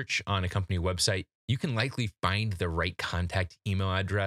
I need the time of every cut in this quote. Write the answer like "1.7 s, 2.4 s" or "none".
1.4 s